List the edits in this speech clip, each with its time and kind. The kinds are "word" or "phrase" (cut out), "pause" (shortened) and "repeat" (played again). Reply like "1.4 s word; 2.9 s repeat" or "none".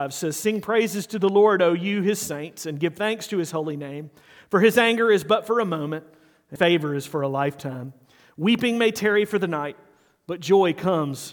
6.6 s word